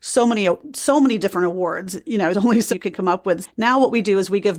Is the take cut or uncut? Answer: cut